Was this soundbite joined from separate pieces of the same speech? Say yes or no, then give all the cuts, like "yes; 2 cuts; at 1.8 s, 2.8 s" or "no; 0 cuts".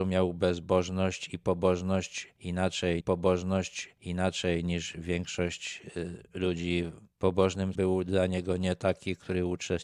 yes; 2 cuts; at 3.0 s, 7.7 s